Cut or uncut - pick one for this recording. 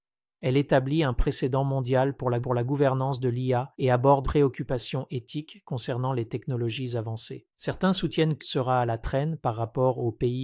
cut